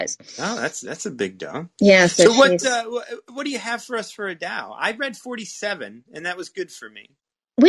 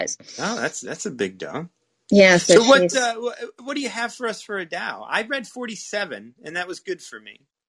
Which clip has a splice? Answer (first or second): first